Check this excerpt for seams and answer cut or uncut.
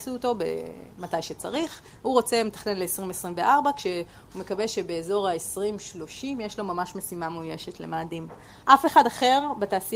cut